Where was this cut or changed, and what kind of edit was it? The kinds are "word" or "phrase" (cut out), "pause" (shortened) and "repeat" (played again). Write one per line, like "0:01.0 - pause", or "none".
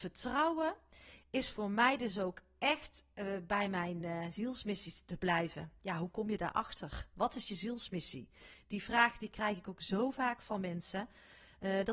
none